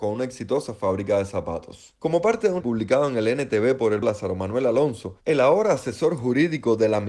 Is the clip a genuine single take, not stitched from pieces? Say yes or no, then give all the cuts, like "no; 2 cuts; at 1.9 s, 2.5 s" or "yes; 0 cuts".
no; 2 cuts; at 2.6 s, 4.0 s